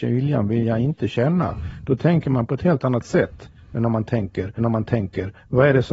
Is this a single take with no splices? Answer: no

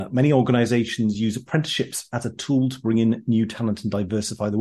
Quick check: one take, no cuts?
yes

